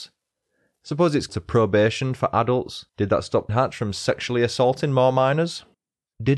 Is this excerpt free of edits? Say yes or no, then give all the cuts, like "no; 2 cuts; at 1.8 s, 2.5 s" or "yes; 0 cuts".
no; 3 cuts; at 1.3 s, 2.9 s, 3.5 s